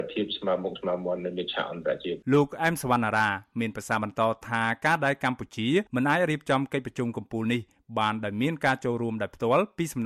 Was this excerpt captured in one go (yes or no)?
no